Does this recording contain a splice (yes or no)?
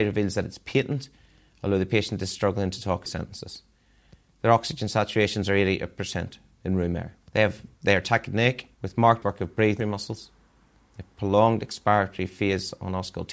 yes